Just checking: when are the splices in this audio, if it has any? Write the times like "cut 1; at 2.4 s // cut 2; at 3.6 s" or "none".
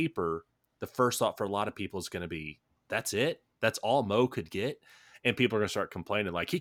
none